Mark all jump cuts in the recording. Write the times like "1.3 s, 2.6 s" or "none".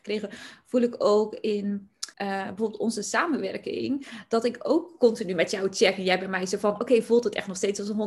2.1 s